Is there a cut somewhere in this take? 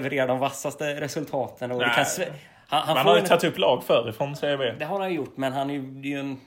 no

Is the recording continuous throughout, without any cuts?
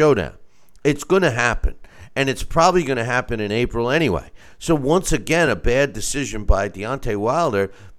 yes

